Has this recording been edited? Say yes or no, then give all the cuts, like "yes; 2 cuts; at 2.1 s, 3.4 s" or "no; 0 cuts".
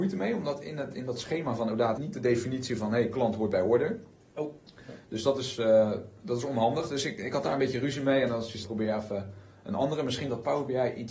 yes; 2 cuts; at 2.0 s, 8.6 s